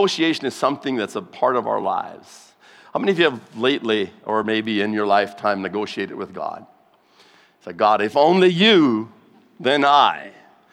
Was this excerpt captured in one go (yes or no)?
yes